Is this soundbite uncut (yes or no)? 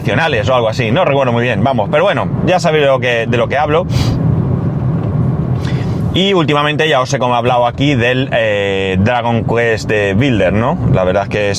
yes